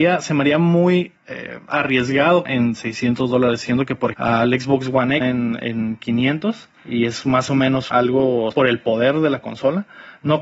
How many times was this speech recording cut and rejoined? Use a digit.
7